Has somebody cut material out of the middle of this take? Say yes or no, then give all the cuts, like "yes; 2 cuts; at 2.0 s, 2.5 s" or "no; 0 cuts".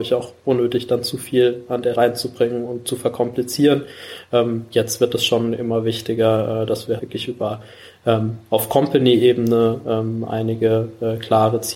yes; 2 cuts; at 1.9 s, 7.0 s